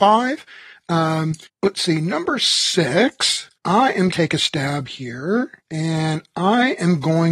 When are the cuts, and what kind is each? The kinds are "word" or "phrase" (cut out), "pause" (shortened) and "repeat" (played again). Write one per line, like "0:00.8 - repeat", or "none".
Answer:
0:01.5 - pause
0:03.6 - pause
0:04.1 - phrase
0:05.6 - pause